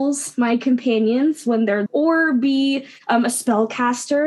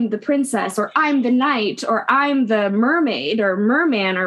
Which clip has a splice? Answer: first; 1 cut; at 1.9 s

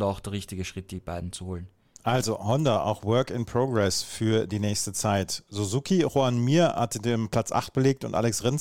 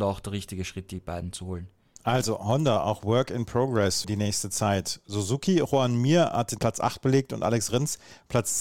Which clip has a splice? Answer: second; 2 cuts; at 4.0 s, 6.6 s

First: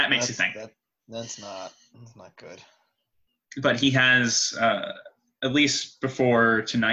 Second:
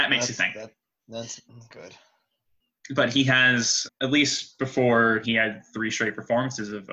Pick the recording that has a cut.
second; 4 cuts; at 1.4 s, 1.7 s, 3.9 s, 5.2 s

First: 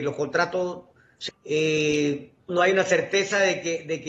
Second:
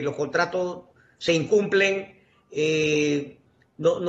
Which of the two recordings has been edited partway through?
first; 2 cuts; at 1.3 s, 2.5 s

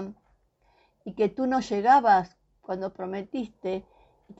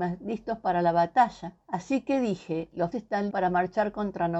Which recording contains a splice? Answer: second; 3 cuts; at 1.6 s, 2.9 s, 3.3 s

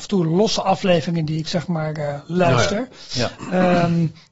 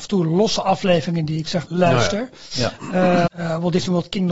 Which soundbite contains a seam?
second; 2 cuts; at 1.7 s, 3.3 s

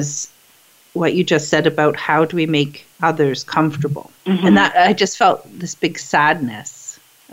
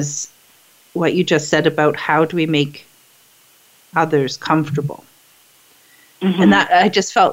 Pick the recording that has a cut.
first; 2 cuts; at 2.9 s, 4.2 s

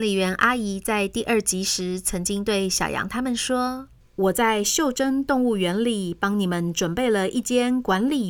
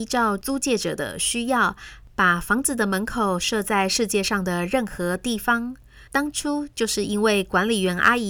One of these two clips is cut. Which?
second; 1 cut; at 6.1 s

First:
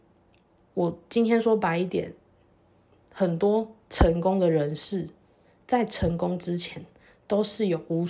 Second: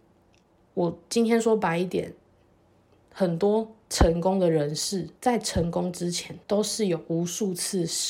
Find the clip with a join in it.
second; 2 cuts; at 5.2 s, 6.4 s

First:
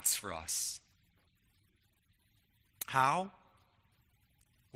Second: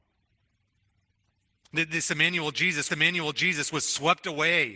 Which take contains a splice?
second; 1 cut; at 2.9 s

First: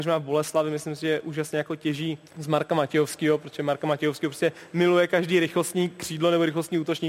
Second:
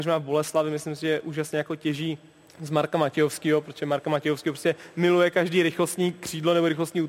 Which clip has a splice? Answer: first; 1 cut; at 2.3 s

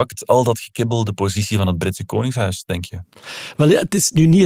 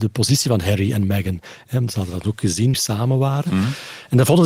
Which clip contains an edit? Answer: second; 1 cut; at 2.7 s

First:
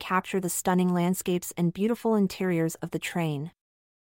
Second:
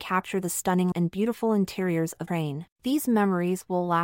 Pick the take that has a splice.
second; 3 cuts; at 0.9 s, 2.3 s, 2.7 s

